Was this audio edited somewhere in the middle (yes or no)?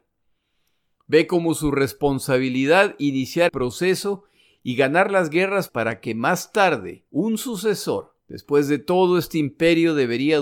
yes